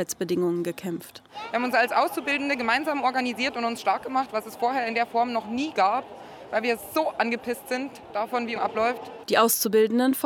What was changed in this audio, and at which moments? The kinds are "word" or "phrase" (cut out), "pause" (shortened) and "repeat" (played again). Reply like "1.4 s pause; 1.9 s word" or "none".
8.6 s phrase